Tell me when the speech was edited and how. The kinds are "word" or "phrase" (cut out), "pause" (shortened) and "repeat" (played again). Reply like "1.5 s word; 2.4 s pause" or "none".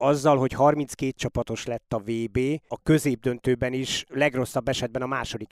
4.1 s word